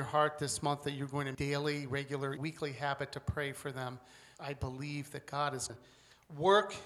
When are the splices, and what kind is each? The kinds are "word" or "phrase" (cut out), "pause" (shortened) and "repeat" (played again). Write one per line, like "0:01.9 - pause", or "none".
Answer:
0:01.3 - phrase
0:02.4 - word
0:04.3 - word
0:05.7 - word